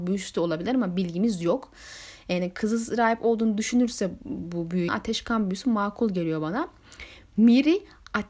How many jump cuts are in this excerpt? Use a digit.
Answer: 1